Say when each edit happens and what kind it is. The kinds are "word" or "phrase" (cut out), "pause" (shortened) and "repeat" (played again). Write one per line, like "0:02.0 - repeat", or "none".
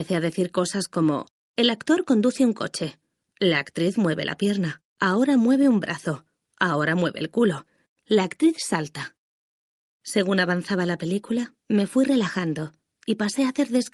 0:04.9 - pause